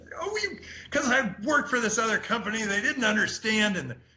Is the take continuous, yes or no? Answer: yes